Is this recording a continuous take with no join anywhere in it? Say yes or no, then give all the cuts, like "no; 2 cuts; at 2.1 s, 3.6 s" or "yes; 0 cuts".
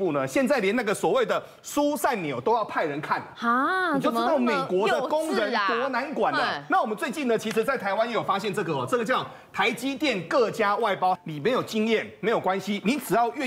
no; 1 cut; at 11.2 s